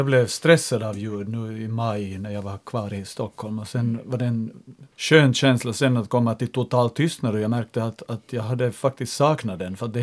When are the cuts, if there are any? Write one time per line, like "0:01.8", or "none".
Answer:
0:04.9